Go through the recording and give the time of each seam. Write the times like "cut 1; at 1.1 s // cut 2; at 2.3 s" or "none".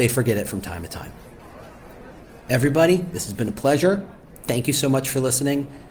none